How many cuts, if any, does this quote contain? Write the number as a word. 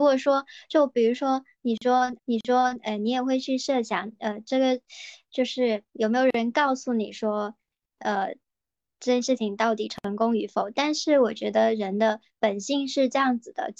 two